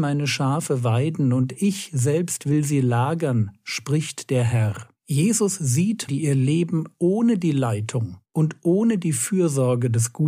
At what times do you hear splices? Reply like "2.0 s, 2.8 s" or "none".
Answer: 5.0 s, 6.1 s, 8.2 s